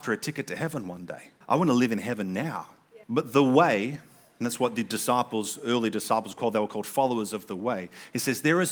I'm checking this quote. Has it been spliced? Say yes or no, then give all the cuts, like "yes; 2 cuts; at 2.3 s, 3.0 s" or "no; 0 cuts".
yes; 2 cuts; at 1.4 s, 3.0 s